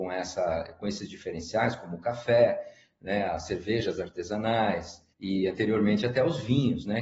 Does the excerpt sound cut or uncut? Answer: cut